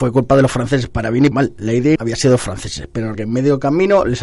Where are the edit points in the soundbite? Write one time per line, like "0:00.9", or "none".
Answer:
0:01.3
0:02.0
0:03.1